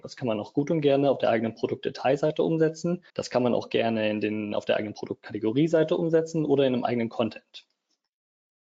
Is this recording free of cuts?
no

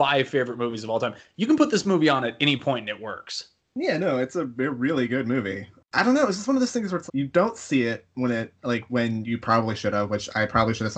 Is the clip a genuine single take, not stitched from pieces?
no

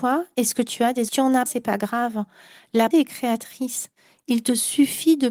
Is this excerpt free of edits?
no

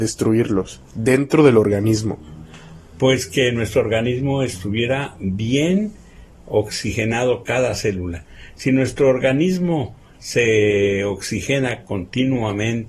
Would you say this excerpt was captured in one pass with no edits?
yes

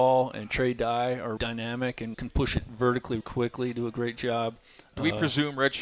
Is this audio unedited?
no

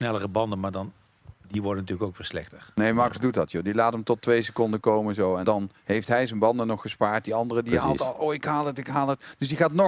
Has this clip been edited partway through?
yes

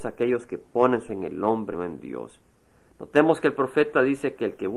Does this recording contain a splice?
yes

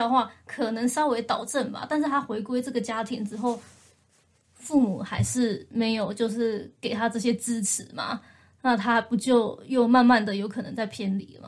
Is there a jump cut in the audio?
no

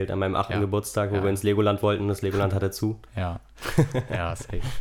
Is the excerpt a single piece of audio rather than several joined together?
yes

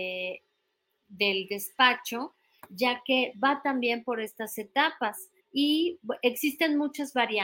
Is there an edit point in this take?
yes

